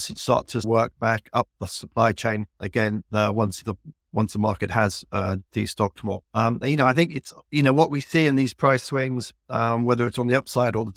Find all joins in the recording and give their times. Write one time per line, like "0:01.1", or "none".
0:06.2